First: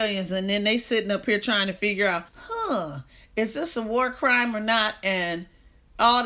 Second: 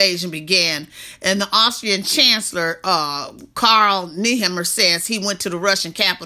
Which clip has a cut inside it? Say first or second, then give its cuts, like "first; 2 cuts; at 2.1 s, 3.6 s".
first; 1 cut; at 2.3 s